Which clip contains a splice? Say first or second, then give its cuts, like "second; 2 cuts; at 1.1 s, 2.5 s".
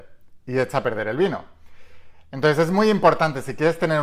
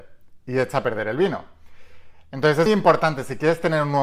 second; 1 cut; at 2.7 s